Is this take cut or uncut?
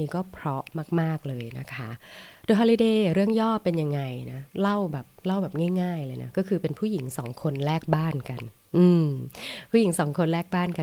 cut